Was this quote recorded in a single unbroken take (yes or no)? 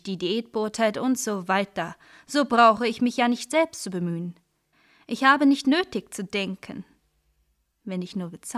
yes